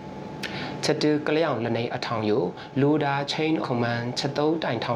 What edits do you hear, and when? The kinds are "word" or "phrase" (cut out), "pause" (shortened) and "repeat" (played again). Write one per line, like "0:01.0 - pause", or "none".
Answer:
0:03.6 - word